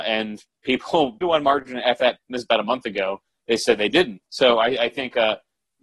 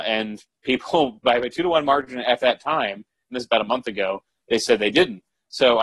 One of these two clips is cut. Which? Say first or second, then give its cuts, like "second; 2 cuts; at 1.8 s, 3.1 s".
first; 3 cuts; at 1.2 s, 2.2 s, 4.3 s